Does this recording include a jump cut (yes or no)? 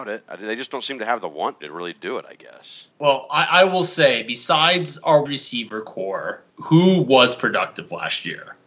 yes